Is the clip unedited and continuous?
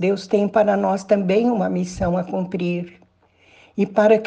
yes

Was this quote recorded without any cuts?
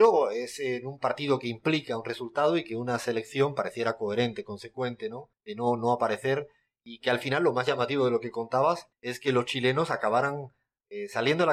no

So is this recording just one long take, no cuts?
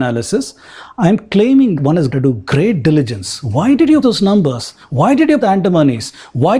no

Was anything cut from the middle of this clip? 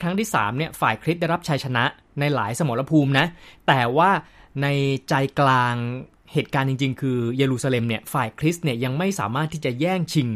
no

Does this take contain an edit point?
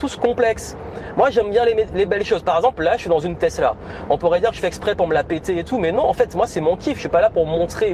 no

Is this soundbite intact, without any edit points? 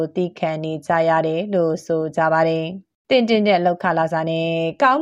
no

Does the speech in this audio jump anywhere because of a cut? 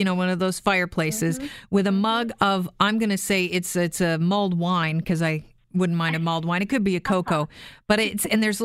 no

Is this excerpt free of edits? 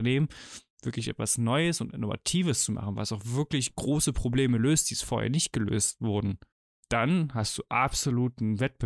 no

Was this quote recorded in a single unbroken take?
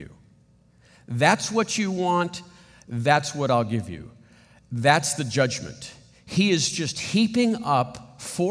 yes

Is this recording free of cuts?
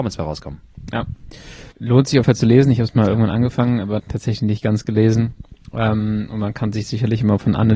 no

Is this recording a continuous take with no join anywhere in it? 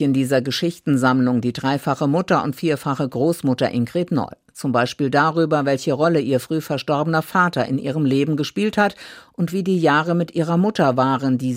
yes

